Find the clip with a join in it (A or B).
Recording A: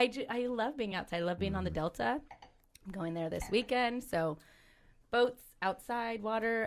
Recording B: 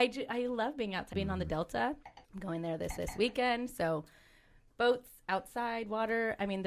B